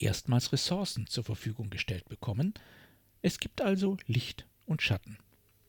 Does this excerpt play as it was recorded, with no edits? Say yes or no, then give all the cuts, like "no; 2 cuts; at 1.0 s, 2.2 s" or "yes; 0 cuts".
yes; 0 cuts